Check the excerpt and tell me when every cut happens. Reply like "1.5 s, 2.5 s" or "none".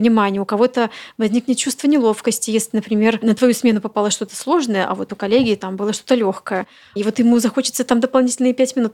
none